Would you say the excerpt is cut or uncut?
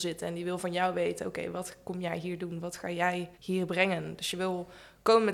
cut